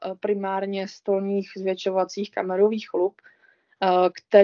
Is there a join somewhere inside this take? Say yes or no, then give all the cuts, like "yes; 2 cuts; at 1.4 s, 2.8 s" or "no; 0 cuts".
no; 0 cuts